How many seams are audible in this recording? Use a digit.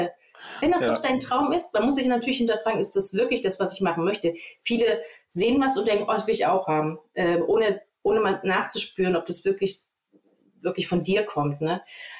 0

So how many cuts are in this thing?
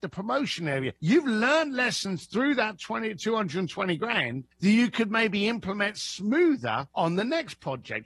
3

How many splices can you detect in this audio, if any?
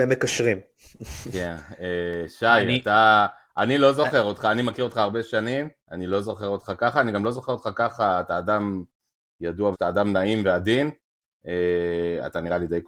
2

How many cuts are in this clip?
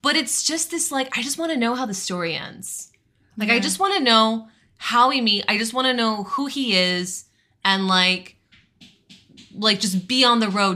0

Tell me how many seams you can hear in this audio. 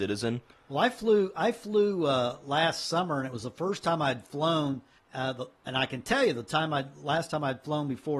1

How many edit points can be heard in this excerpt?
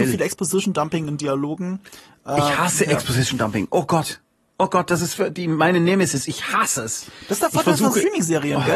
0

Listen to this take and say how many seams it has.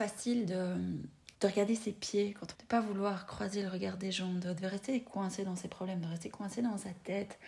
2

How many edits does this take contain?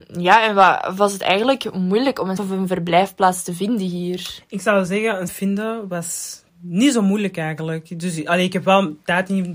3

